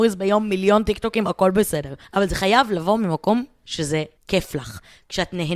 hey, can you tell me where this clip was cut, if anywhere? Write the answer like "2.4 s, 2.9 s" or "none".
2.0 s, 4.2 s